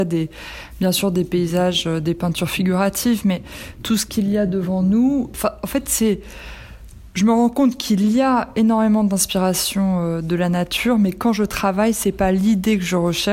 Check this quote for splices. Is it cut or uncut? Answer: uncut